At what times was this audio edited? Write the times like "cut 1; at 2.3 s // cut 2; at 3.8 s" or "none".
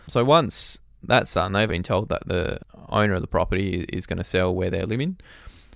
cut 1; at 1.7 s